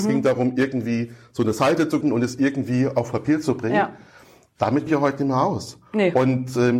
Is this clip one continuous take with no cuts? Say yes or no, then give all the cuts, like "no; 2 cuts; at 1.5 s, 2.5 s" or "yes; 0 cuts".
no; 2 cuts; at 2.0 s, 4.9 s